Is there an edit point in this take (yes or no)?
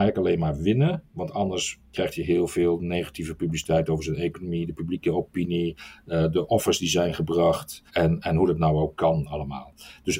yes